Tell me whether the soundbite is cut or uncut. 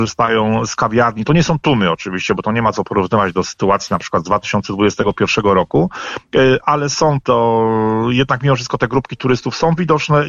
uncut